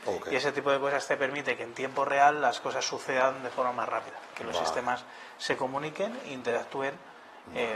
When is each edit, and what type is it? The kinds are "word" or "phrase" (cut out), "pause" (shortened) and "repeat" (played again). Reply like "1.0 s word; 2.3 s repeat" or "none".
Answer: none